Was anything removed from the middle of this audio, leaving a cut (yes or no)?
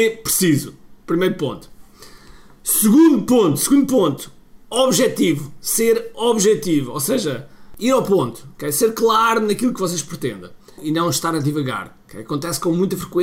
no